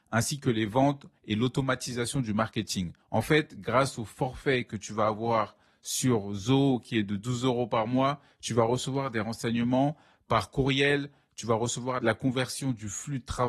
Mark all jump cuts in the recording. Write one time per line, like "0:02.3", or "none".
0:03.0